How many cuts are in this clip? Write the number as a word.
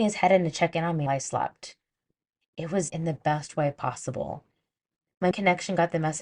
three